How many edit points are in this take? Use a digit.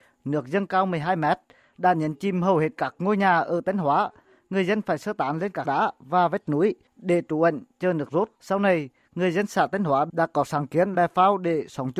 3